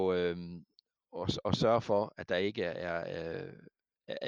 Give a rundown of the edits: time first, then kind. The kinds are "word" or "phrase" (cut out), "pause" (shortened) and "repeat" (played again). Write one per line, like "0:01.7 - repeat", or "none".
none